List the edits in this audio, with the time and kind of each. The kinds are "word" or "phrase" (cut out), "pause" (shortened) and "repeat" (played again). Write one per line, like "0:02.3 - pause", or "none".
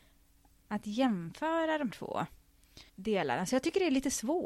0:01.9 - word
0:02.9 - pause